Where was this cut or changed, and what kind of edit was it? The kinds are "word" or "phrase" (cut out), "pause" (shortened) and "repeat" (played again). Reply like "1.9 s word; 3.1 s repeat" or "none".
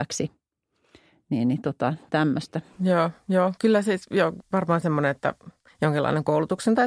5.7 s pause